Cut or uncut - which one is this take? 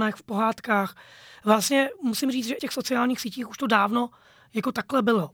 cut